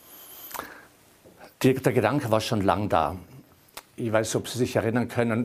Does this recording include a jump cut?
yes; 1 cut; at 1.5 s

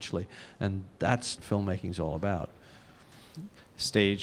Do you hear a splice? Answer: yes; 1 cut; at 1.4 s

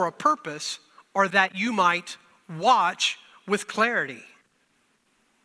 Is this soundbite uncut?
yes; 0 cuts

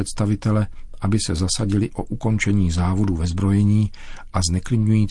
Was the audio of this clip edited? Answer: no; 0 cuts

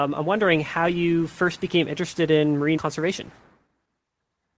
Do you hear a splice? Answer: yes; 1 cut; at 2.8 s

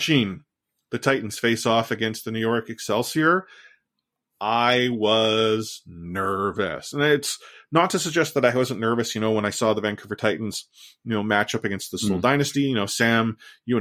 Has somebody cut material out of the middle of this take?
no; 0 cuts

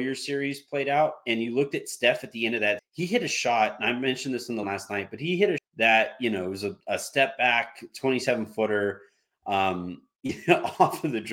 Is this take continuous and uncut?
no; 4 cuts; at 2.8 s, 4.6 s, 5.6 s, 6.8 s

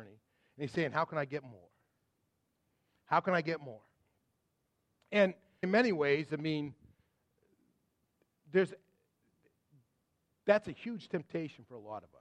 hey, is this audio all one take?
no; 1 cut; at 5.6 s

